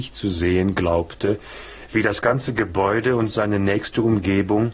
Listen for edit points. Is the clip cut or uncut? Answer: uncut